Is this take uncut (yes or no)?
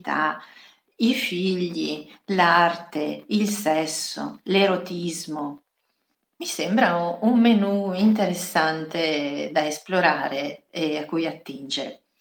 yes